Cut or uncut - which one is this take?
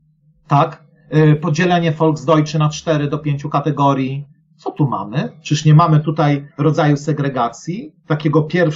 cut